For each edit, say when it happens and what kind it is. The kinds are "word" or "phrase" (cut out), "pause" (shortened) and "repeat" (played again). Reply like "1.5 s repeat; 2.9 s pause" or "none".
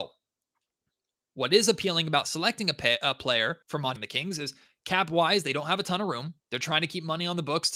3.6 s pause; 4.0 s word; 6.4 s pause